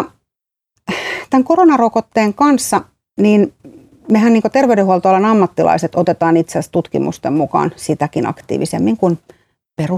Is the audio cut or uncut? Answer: uncut